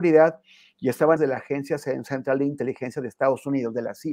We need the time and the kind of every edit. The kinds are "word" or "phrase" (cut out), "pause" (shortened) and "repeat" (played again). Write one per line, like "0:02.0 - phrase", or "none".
0:01.2 - word